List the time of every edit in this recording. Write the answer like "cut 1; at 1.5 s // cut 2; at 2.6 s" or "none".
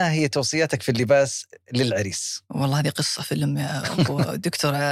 none